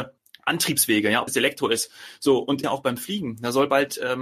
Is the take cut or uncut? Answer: cut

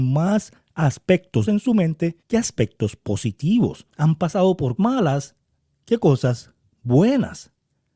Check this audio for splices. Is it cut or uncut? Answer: cut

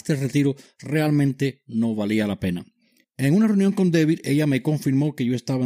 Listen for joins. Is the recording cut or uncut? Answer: uncut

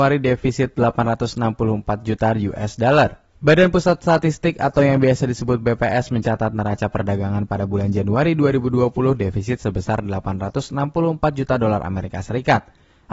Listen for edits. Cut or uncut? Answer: cut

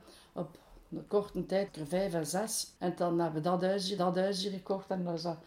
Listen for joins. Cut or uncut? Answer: cut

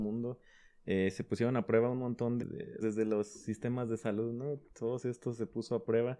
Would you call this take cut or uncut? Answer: cut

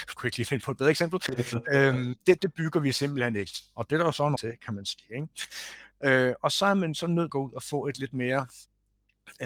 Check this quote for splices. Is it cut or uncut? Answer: cut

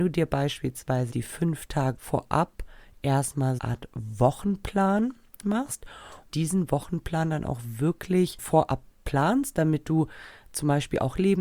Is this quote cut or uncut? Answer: cut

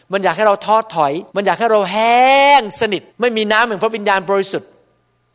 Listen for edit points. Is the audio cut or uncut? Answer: cut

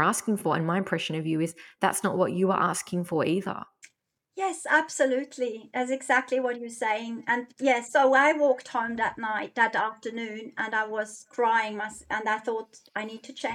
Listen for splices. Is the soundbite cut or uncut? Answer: uncut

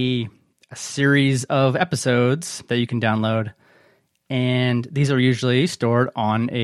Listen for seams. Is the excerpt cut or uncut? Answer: uncut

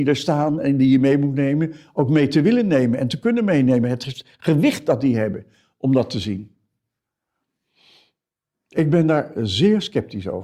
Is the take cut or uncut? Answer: uncut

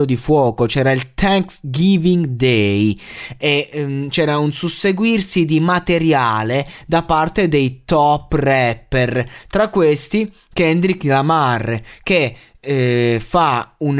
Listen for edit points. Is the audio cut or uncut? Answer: uncut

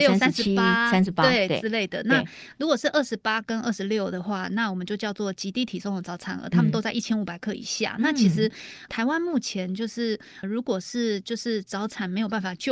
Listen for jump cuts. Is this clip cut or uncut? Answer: cut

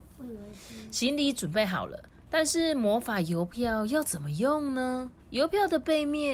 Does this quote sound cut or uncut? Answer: cut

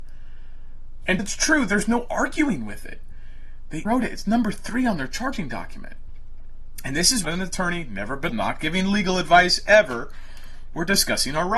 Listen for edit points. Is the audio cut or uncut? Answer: cut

